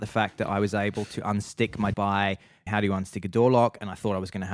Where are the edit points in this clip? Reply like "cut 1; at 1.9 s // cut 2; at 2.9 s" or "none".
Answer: cut 1; at 1.9 s // cut 2; at 2.7 s